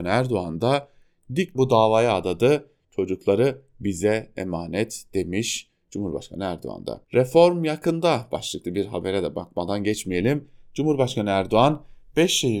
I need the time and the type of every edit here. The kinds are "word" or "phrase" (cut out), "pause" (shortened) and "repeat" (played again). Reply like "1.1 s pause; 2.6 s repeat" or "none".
1.6 s phrase; 7.0 s pause